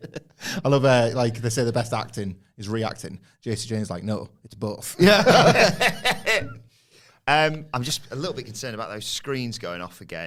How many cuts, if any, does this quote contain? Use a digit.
0